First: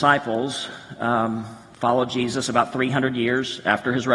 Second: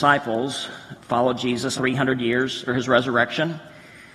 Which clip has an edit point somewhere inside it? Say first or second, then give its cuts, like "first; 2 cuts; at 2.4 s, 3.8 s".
second; 3 cuts; at 0.9 s, 1.8 s, 2.7 s